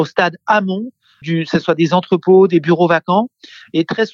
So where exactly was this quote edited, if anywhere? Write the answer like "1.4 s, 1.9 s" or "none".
1.2 s